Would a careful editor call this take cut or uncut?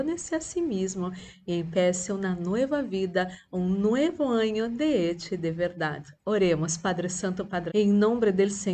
cut